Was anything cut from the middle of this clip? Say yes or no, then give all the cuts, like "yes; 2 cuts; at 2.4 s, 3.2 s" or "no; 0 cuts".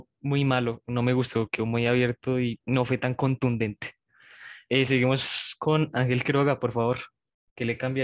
no; 0 cuts